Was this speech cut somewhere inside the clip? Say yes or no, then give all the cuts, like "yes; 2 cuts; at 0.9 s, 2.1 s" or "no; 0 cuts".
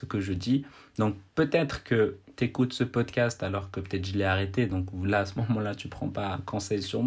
no; 0 cuts